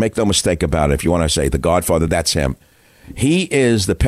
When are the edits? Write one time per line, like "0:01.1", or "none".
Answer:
none